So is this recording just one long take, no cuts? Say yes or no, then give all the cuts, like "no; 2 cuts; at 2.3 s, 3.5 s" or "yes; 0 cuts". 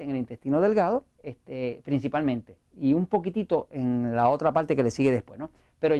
no; 2 cuts; at 1.1 s, 2.7 s